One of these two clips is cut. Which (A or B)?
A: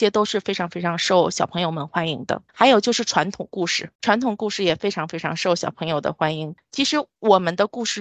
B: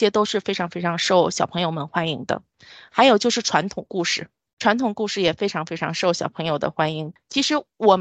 A